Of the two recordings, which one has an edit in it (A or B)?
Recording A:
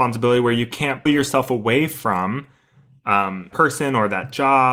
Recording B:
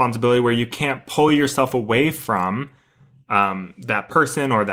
A